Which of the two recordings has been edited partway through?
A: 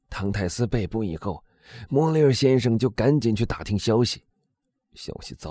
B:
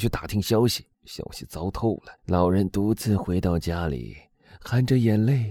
B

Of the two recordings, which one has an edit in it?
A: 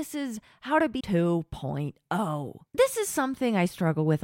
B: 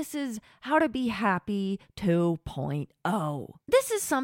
A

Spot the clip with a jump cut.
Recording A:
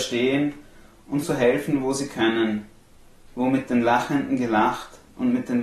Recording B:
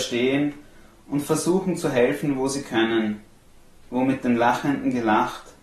A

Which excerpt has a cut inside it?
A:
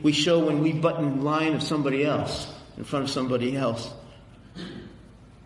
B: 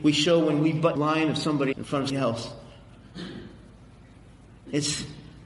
B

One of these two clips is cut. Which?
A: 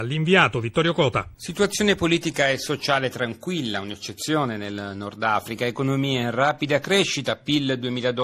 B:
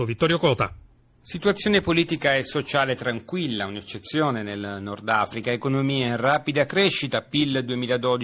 A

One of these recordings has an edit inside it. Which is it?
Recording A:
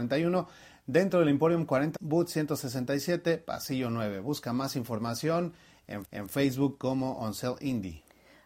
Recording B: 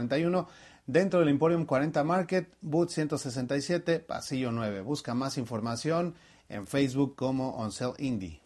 A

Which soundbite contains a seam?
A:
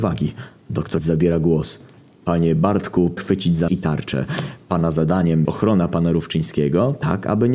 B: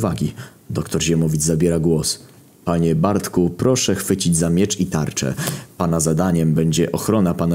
A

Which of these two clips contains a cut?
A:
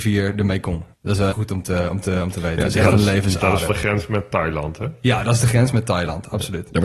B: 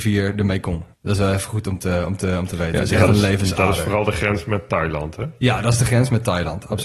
A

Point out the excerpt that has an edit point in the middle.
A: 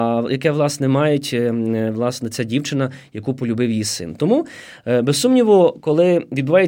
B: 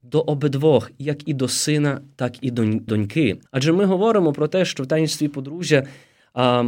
B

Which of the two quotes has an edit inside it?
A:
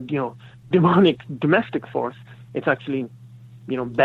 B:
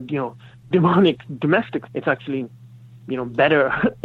B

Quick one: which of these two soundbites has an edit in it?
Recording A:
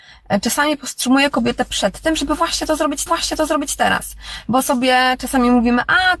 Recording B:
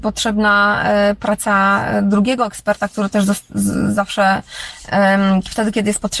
A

